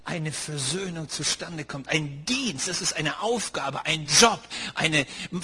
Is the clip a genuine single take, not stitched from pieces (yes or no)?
yes